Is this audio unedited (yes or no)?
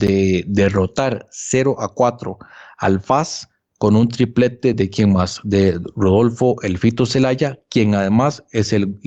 yes